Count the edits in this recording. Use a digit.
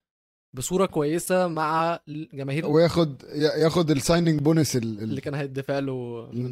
1